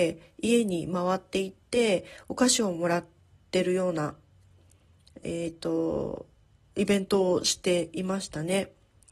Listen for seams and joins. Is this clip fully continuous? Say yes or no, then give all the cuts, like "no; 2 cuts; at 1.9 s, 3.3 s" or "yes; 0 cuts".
yes; 0 cuts